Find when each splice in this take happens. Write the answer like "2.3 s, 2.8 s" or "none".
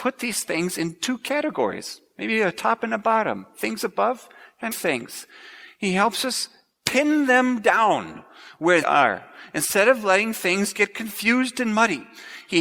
4.7 s, 8.8 s